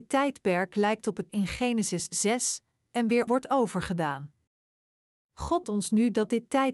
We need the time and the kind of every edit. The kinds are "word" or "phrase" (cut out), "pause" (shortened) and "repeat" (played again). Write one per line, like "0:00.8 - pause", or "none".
0:01.3 - word
0:03.3 - word
0:05.6 - word